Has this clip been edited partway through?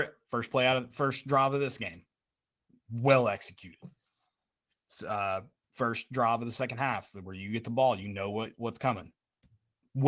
no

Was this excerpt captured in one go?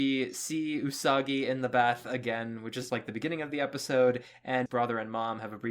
no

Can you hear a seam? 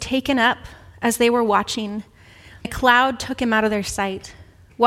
yes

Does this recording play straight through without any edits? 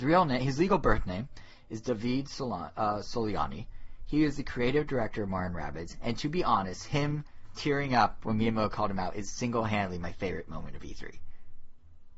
yes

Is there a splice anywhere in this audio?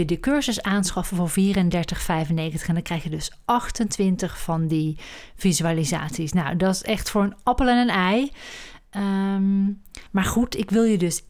yes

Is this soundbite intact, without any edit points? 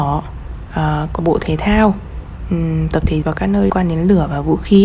no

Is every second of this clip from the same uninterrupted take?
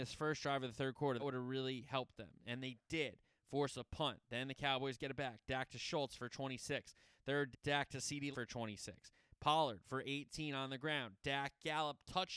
no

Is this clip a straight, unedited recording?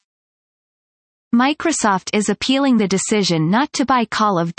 yes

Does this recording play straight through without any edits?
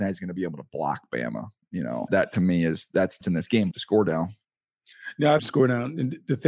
no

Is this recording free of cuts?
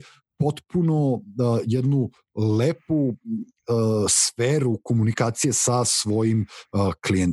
yes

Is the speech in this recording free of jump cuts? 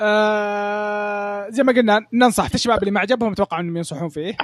no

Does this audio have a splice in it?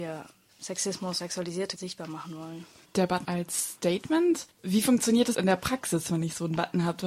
yes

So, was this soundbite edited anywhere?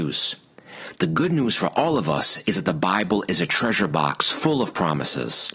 no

